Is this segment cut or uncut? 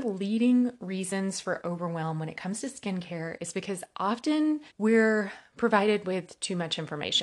cut